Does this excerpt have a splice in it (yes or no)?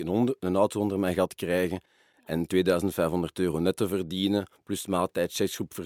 no